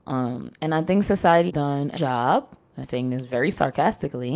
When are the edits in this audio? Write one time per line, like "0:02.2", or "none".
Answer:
0:01.5
0:02.0
0:02.8